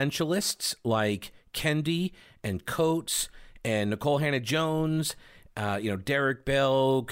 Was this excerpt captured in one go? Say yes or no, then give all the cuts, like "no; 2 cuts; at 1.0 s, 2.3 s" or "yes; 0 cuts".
yes; 0 cuts